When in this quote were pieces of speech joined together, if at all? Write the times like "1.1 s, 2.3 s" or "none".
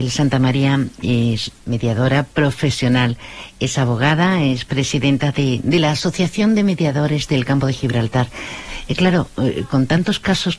1.6 s